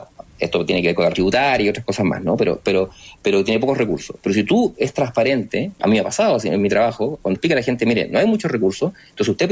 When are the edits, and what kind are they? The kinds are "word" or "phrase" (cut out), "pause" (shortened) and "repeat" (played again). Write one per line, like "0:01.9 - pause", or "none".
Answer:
0:01.1 - word
0:05.8 - word
0:07.3 - phrase